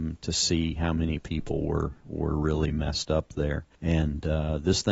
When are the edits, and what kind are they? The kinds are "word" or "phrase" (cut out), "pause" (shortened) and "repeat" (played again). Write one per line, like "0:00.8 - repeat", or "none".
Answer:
0:03.7 - pause